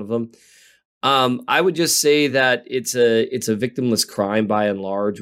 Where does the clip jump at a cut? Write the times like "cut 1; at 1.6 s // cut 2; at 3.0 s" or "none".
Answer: none